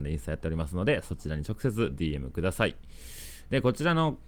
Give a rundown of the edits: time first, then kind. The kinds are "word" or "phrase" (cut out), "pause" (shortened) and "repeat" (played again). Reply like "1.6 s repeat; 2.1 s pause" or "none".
none

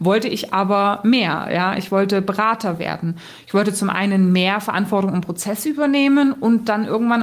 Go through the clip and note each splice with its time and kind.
none

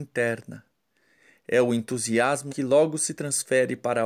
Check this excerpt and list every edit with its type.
2.5 s word

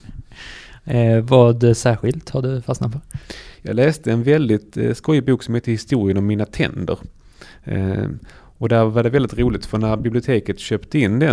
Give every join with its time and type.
3.5 s pause

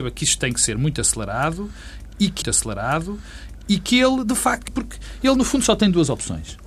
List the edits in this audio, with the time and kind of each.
2.4 s repeat; 4.7 s word

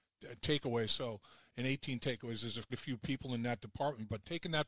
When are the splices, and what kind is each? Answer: 2.7 s word

